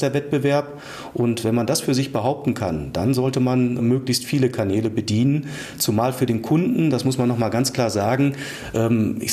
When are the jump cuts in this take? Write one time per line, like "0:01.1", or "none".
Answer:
0:03.8

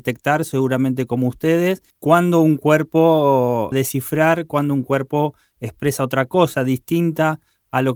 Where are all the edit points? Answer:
0:01.9
0:03.7

